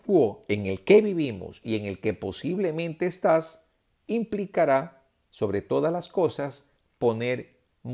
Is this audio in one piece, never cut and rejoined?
yes; 0 cuts

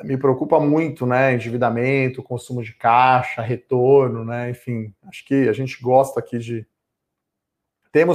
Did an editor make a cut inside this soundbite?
no; 0 cuts

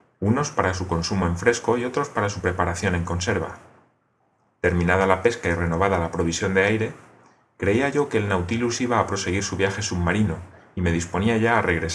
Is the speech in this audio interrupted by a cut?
no; 0 cuts

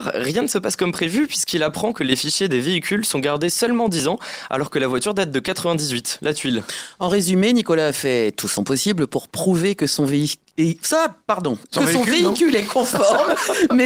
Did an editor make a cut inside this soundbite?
no; 0 cuts

